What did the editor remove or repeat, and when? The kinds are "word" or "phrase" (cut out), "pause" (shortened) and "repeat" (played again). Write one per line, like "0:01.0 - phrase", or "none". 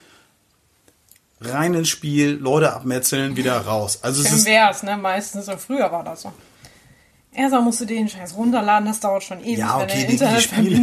none